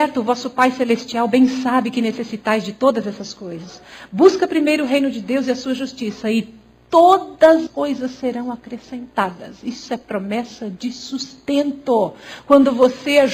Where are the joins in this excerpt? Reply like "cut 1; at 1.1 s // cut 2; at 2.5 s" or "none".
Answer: cut 1; at 7.7 s